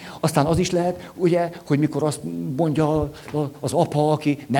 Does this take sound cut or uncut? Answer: uncut